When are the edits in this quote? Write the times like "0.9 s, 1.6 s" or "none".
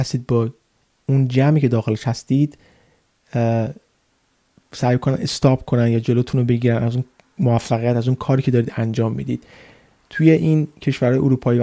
none